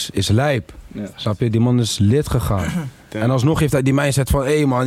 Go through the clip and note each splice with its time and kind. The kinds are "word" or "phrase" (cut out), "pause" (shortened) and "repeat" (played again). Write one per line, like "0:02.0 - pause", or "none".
none